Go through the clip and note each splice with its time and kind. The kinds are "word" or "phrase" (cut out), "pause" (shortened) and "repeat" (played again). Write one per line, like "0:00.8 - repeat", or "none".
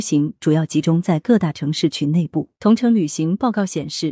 0:02.6 - pause